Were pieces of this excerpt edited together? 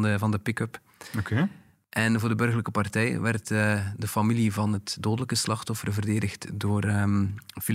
no; 0 cuts

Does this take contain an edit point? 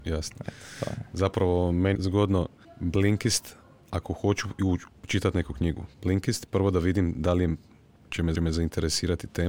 yes; 4 cuts; at 1.9 s, 2.6 s, 5.9 s, 8.3 s

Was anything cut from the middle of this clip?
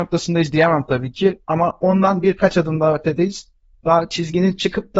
no; 0 cuts

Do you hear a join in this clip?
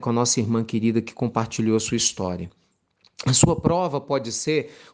no; 0 cuts

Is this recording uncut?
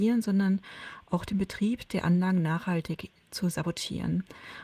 yes; 0 cuts

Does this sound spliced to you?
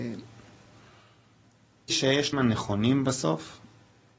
yes; 2 cuts; at 1.9 s, 2.3 s

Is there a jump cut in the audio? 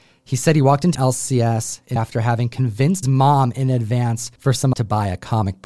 yes; 5 cuts; at 0.9 s, 2.0 s, 3.0 s, 4.4 s, 4.7 s

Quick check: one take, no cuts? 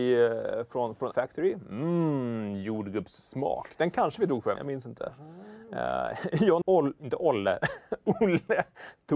no; 4 cuts; at 1.1 s, 4.6 s, 6.6 s, 7.0 s

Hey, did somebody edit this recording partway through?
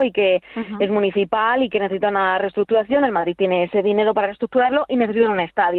no; 0 cuts

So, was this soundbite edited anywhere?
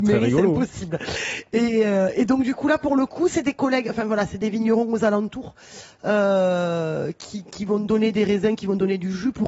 no; 0 cuts

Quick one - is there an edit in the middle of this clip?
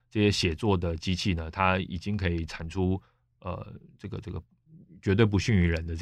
no; 0 cuts

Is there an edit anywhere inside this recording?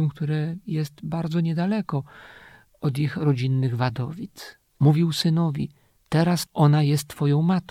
yes; 1 cut; at 4.7 s

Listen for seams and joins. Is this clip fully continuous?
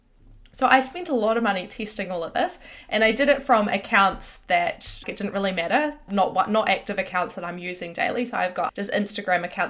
no; 3 cuts; at 5.0 s, 6.1 s, 8.7 s

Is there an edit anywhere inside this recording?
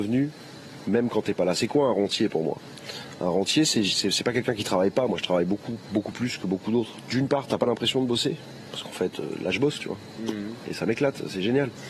no; 0 cuts

